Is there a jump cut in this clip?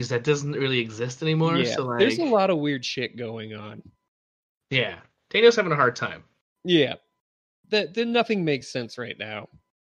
no; 0 cuts

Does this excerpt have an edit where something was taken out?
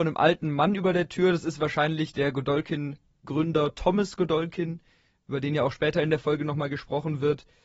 no; 0 cuts

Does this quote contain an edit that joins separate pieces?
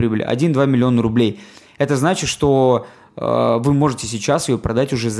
no; 0 cuts

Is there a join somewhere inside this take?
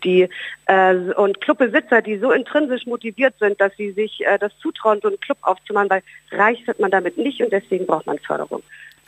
no; 0 cuts

